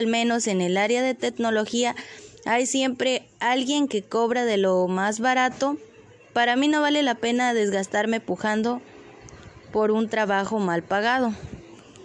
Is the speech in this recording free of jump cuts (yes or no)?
yes